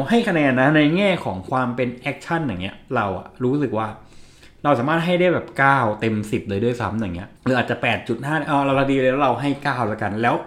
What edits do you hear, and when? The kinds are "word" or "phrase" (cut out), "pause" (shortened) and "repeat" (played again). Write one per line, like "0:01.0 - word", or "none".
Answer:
0:07.4 - pause